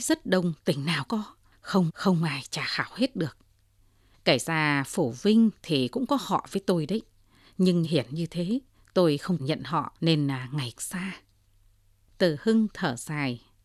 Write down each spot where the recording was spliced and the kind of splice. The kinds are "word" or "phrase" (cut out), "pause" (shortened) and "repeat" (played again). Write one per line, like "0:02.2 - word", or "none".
0:01.1 - word
0:01.9 - repeat
0:07.8 - phrase
0:09.4 - word
0:10.0 - pause
0:10.8 - word